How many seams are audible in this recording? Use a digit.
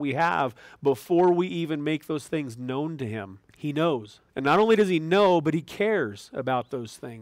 2